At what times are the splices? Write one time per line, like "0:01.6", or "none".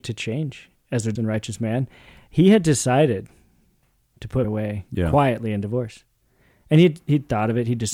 0:01.2
0:04.4